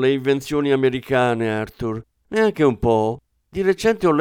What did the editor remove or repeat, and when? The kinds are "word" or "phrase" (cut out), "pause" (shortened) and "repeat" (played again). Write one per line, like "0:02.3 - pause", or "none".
none

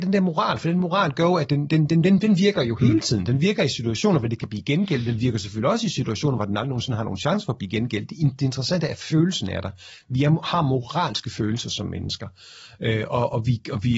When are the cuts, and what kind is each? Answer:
none

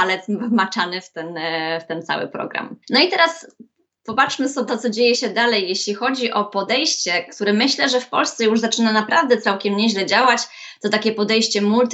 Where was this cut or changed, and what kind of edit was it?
0:02.8 - pause
0:04.7 - word

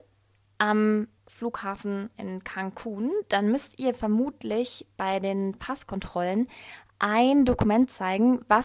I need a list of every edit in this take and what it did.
0:01.2 - pause

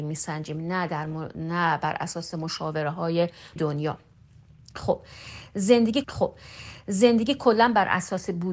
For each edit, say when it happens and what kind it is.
0:03.6 - word
0:06.0 - repeat

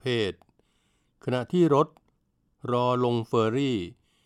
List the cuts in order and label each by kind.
none

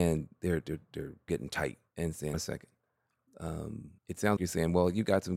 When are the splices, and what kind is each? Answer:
0:01.3 - word
0:01.9 - pause
0:02.3 - phrase
0:04.0 - pause
0:04.4 - word

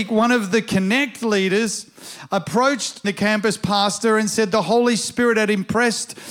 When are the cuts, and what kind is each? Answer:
0:03.0 - word

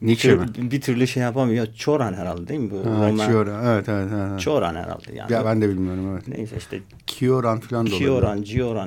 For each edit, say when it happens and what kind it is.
none

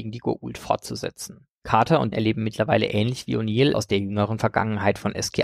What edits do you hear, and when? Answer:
0:01.5 - pause
0:02.1 - word
0:03.7 - word

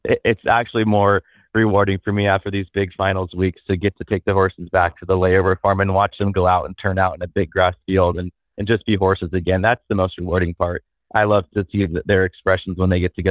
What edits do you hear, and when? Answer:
none

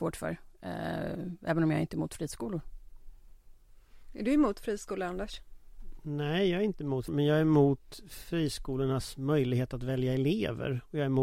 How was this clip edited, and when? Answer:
0:04.0 - pause
0:07.1 - word

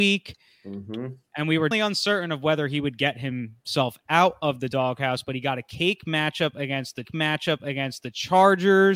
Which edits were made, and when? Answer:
0:01.7 - word
0:07.0 - repeat

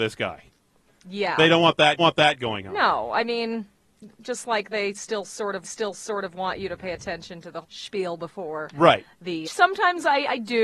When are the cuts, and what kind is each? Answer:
0:02.0 - repeat
0:05.6 - repeat
0:07.6 - word
0:09.4 - phrase

